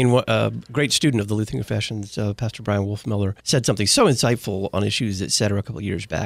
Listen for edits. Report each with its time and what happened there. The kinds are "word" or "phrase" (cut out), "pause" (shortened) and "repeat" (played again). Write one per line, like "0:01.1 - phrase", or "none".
0:03.4 - pause